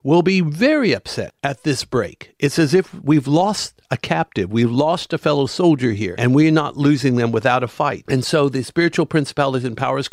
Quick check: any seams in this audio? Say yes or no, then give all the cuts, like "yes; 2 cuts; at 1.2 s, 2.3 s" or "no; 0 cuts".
yes; 1 cut; at 1.4 s